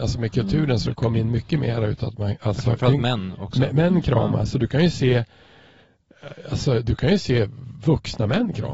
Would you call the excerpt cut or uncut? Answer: uncut